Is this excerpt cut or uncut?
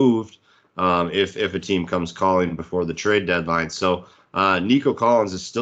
uncut